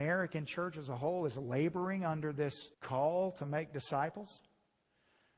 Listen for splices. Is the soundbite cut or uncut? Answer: cut